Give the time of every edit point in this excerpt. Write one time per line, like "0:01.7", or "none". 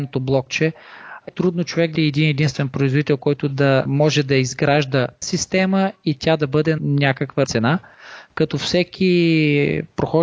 0:01.3
0:01.9
0:03.8
0:05.2
0:06.8
0:07.4